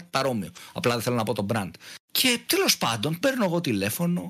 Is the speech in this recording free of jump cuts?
no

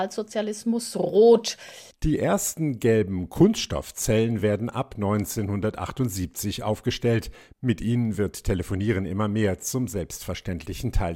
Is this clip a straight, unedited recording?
yes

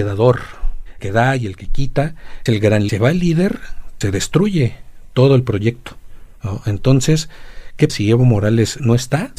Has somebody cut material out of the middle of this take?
yes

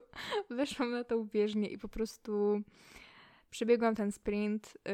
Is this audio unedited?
yes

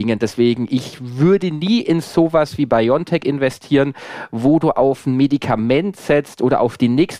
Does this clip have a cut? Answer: no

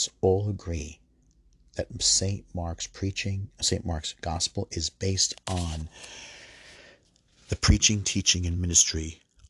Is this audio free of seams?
yes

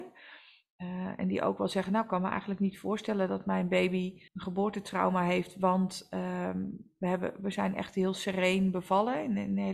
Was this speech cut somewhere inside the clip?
yes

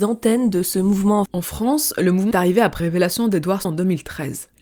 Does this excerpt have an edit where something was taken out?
yes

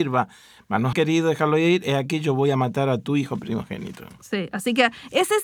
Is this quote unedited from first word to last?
no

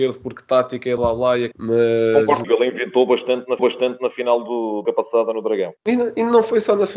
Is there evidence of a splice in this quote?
yes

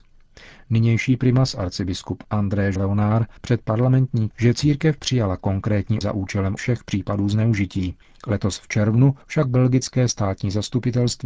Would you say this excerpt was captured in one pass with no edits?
no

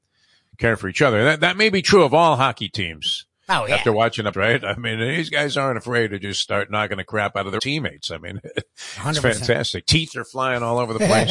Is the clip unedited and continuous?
no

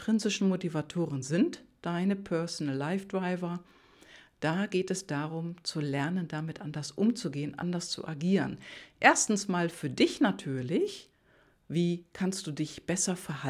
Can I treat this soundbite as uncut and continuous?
yes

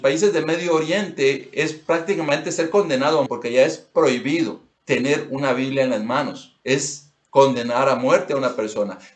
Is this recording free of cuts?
no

